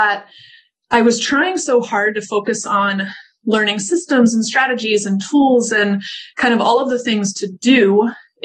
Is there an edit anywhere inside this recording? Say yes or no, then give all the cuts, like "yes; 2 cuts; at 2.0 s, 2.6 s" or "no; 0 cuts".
no; 0 cuts